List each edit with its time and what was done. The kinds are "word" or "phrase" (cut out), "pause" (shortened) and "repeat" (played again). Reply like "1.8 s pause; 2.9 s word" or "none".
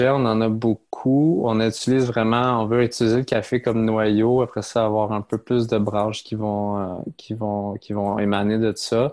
none